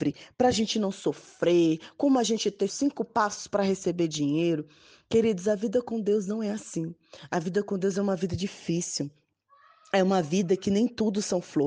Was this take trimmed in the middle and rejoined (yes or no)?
yes